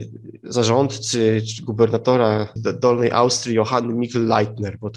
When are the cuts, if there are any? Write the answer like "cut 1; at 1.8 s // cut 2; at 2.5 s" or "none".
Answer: cut 1; at 2.6 s